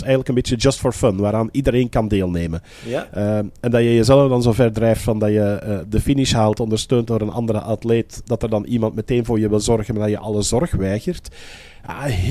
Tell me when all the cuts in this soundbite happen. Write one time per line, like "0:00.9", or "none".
0:08.2